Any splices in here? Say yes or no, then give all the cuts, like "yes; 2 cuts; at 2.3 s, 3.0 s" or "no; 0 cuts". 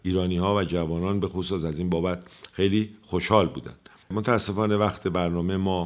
no; 0 cuts